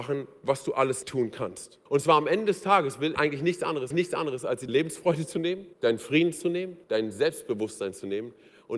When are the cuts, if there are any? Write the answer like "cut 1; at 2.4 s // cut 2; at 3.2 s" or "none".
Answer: cut 1; at 1.0 s // cut 2; at 1.9 s // cut 3; at 3.2 s // cut 4; at 3.9 s // cut 5; at 4.7 s // cut 6; at 5.7 s // cut 7; at 6.8 s